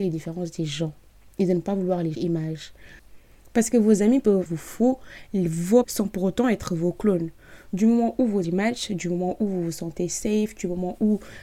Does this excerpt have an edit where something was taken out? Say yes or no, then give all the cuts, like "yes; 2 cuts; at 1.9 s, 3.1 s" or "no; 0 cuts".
yes; 4 cuts; at 2.1 s, 4.5 s, 5.8 s, 8.4 s